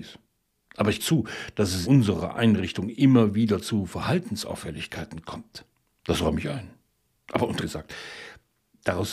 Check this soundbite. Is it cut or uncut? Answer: cut